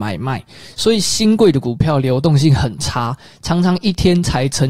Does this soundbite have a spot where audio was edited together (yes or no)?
no